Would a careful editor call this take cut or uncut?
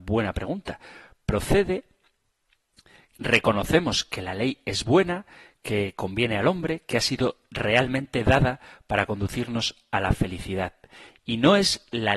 uncut